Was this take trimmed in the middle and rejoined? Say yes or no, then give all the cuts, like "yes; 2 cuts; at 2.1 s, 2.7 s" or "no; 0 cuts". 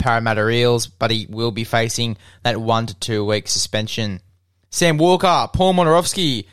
no; 0 cuts